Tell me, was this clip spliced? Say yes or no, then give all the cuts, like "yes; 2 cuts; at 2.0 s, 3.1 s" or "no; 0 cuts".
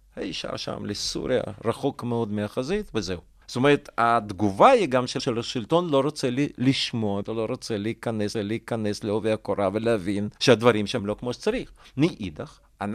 yes; 6 cuts; at 3.4 s, 5.2 s, 7.2 s, 8.3 s, 10.4 s, 11.0 s